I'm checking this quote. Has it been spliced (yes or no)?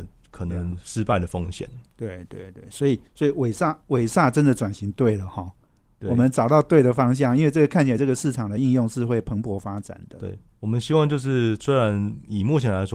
yes